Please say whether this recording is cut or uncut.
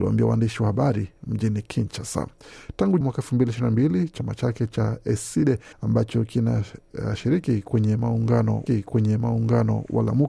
cut